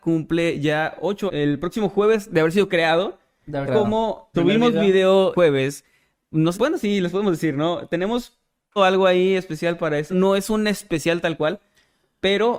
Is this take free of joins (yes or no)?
no